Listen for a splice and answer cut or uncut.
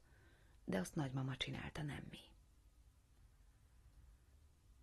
uncut